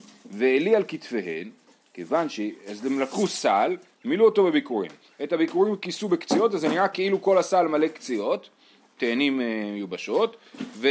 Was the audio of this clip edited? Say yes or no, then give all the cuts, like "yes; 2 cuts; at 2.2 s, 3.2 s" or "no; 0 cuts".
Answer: no; 0 cuts